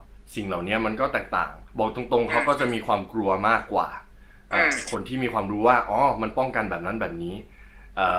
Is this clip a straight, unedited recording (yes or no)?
no